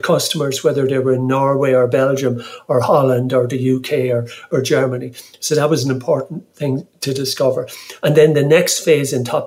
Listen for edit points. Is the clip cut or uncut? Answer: uncut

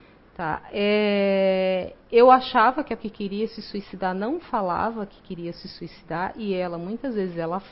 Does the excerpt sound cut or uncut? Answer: cut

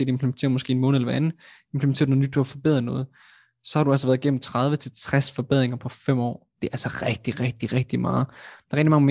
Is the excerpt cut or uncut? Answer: uncut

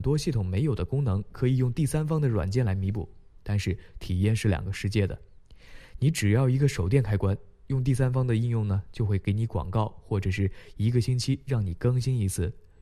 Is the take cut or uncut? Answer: uncut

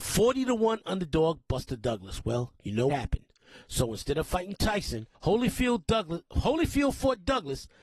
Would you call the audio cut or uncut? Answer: cut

